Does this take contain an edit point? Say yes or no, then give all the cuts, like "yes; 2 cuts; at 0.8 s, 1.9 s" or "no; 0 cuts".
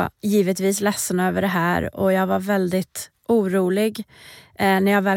no; 0 cuts